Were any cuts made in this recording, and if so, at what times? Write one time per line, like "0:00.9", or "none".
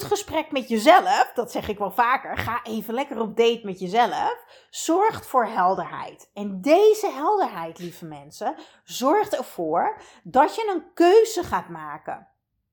none